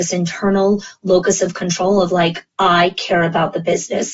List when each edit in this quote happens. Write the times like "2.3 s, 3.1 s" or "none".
2.5 s